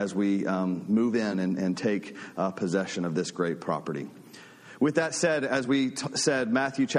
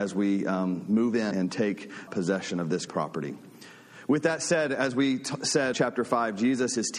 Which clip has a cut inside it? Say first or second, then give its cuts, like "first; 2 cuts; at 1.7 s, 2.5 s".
second; 4 cuts; at 1.3 s, 2.1 s, 2.9 s, 5.7 s